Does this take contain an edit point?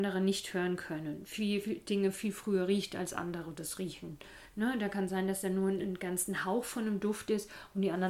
no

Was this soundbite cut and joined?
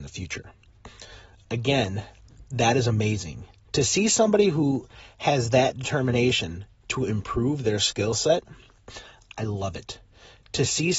no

